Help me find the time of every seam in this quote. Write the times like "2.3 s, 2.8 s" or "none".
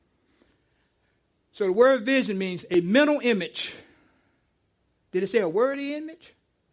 none